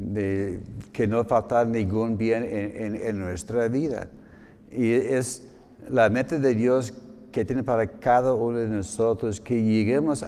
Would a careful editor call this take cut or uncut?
uncut